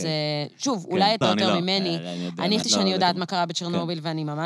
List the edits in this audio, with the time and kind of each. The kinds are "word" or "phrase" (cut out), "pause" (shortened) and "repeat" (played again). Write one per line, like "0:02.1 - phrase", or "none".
0:01.2 - phrase
0:02.6 - word